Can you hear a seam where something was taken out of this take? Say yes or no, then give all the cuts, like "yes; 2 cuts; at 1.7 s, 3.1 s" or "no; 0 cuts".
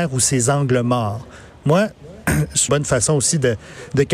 yes; 1 cut; at 2.7 s